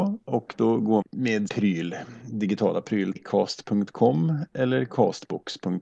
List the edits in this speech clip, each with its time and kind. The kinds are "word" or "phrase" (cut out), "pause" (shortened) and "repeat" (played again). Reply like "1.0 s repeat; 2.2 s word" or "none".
1.0 s word; 1.5 s word; 3.2 s word